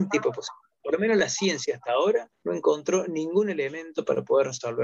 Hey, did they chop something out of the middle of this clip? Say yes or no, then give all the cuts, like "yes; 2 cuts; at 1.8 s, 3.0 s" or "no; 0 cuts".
yes; 1 cut; at 2.4 s